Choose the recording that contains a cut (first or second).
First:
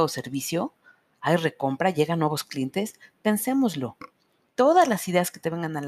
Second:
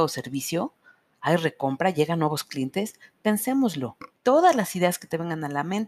second